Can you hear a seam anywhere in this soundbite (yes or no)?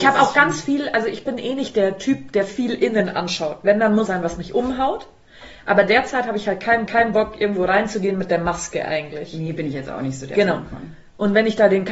yes